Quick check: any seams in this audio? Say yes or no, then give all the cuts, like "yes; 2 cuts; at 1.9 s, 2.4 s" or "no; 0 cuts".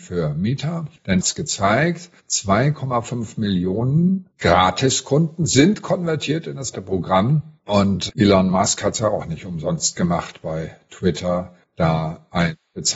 yes; 5 cuts; at 1.2 s, 2.2 s, 4.3 s, 6.7 s, 7.6 s